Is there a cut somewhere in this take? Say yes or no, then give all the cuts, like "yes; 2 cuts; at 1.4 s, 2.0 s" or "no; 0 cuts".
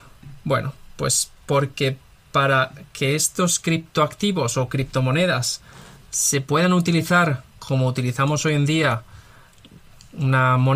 no; 0 cuts